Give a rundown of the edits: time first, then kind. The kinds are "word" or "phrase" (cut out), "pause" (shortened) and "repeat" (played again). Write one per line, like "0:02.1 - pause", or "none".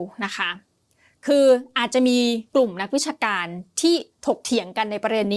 0:02.5 - pause